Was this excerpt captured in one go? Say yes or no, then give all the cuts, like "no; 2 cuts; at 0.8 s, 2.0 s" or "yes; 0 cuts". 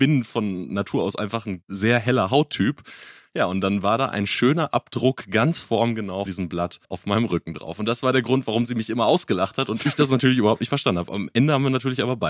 no; 2 cuts; at 6.3 s, 6.8 s